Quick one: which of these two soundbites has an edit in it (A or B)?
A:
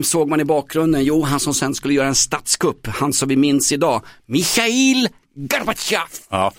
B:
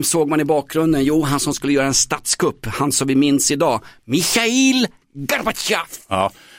B